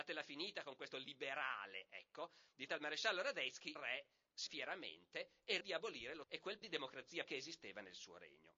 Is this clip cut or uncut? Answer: cut